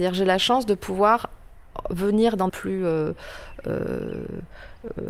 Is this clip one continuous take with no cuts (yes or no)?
no